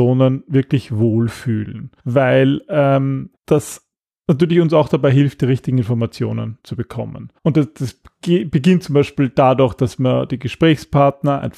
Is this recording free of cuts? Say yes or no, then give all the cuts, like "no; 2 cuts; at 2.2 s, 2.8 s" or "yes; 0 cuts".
no; 3 cuts; at 2.0 s, 3.4 s, 7.4 s